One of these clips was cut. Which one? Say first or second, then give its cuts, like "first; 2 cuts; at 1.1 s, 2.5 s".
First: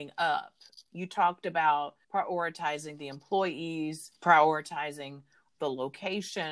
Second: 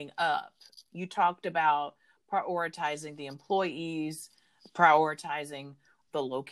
first; 2 cuts; at 2.0 s, 4.2 s